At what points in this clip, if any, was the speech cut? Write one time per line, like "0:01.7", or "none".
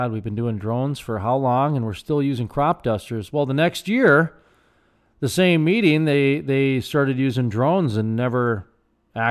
none